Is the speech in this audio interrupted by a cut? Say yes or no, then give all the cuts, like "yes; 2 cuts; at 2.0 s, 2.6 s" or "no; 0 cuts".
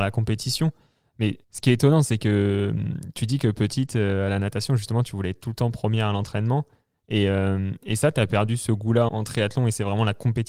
yes; 2 cuts; at 1.4 s, 9.1 s